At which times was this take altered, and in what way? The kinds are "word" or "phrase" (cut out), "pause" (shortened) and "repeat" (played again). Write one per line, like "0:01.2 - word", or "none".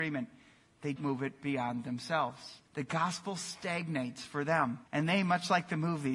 0:01.0 - phrase
0:02.7 - pause
0:04.9 - pause